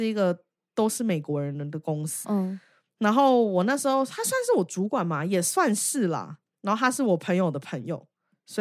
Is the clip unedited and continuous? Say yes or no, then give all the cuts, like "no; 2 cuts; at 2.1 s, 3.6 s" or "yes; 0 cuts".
no; 1 cut; at 2.2 s